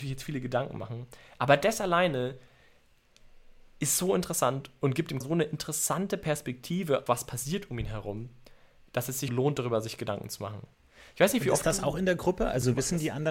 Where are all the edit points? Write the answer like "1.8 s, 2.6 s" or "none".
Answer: 5.2 s, 7.1 s, 9.3 s